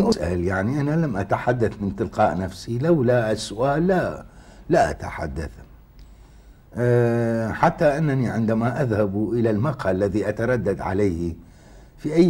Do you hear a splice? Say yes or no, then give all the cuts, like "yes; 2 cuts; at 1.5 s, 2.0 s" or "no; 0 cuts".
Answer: no; 0 cuts